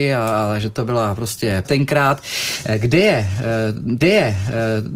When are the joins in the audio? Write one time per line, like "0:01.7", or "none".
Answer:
0:01.6
0:04.0